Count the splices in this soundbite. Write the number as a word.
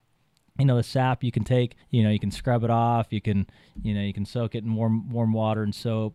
one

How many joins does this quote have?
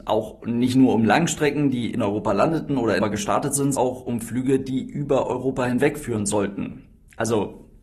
two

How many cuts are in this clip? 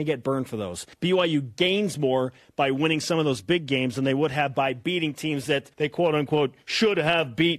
two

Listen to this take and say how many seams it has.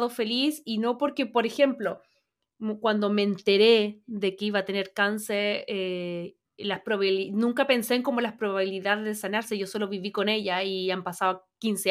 one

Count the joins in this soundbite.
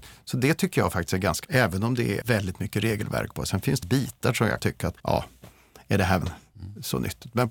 seven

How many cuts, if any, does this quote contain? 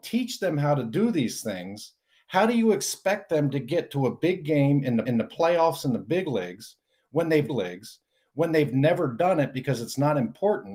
two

